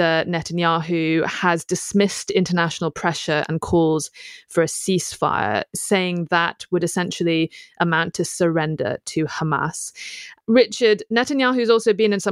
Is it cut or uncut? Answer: uncut